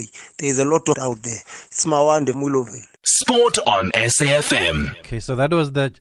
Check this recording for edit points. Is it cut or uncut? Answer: cut